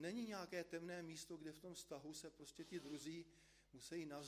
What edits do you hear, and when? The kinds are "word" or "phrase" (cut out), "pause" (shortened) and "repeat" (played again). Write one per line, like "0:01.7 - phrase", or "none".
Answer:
none